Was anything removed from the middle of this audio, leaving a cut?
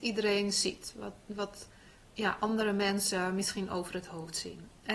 no; 0 cuts

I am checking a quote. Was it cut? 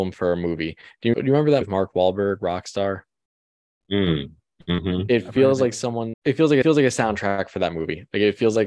yes; 4 cuts; at 1.1 s, 1.6 s, 6.1 s, 6.6 s

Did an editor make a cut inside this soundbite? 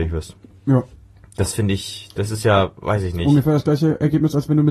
no; 0 cuts

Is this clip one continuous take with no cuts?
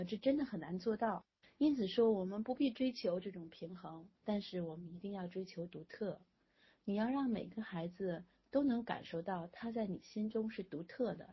no; 1 cut; at 4.1 s

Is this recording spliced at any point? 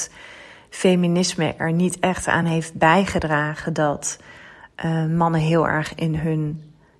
no; 0 cuts

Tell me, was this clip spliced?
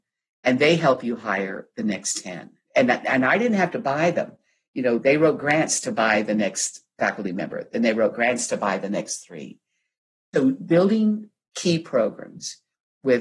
no; 0 cuts

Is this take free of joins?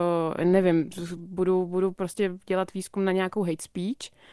yes; 0 cuts

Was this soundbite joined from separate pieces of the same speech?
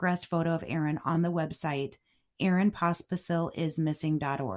no; 0 cuts

